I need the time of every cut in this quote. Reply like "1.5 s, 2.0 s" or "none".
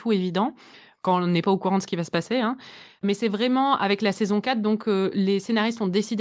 none